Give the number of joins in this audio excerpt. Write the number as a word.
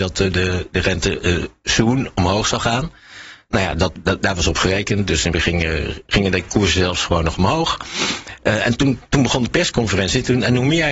one